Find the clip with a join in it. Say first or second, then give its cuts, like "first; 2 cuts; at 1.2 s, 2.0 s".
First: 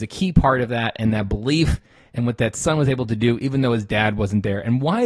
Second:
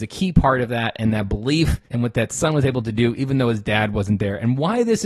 second; 1 cut; at 1.9 s